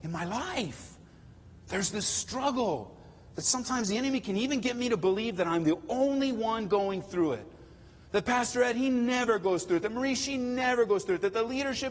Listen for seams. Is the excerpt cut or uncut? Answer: uncut